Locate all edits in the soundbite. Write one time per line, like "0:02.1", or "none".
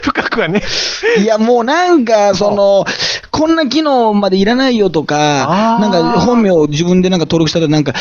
none